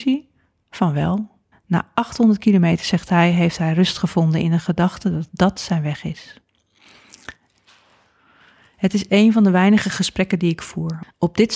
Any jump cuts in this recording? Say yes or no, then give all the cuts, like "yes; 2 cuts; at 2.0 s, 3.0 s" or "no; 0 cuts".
yes; 1 cut; at 1.5 s